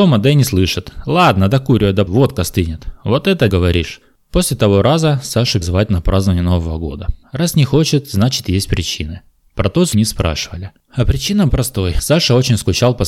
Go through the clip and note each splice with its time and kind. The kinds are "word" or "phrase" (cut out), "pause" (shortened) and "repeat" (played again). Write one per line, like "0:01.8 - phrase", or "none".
0:02.1 - word
0:03.5 - word
0:05.6 - word
0:09.9 - word
0:11.5 - word